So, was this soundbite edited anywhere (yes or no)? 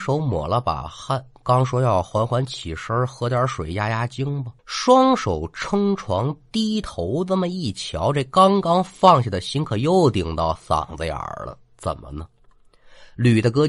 yes